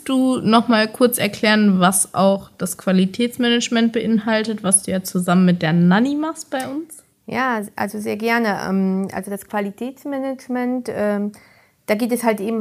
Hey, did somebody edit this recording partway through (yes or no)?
no